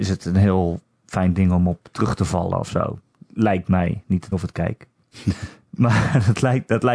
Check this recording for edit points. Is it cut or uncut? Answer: cut